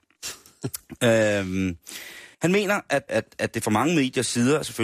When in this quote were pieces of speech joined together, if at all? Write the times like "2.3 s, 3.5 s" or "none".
2.3 s, 3.1 s

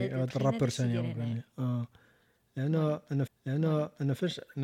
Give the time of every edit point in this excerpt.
3.3 s

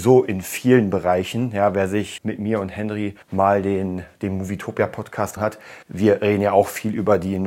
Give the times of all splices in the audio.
2.2 s, 3.2 s, 5.4 s, 5.8 s

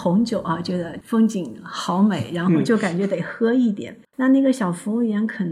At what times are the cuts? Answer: 4.1 s

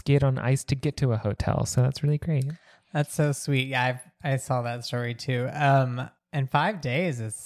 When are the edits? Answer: none

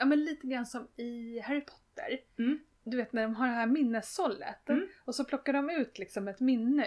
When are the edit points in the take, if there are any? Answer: none

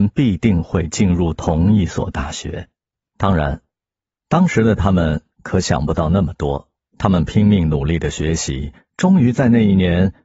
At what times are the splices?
3.0 s, 6.8 s

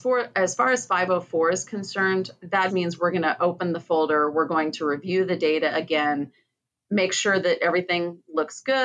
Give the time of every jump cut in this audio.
2.7 s

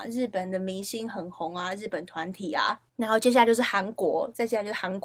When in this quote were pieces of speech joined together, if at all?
2.9 s

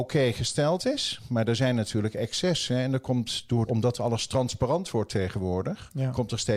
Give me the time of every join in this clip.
3.7 s

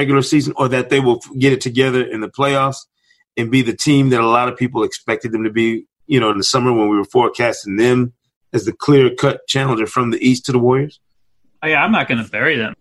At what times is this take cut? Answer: none

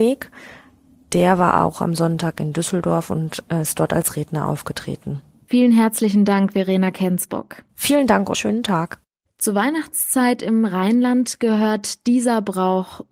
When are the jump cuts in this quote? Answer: 8.3 s

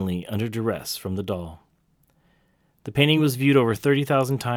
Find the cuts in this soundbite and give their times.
none

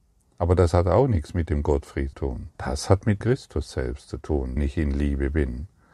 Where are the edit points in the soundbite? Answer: 2.1 s, 2.5 s, 3.2 s, 4.6 s

